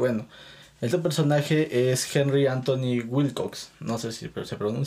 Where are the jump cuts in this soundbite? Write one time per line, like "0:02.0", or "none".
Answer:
0:00.9